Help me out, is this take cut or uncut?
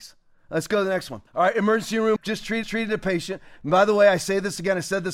cut